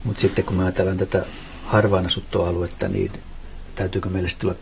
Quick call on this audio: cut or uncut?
uncut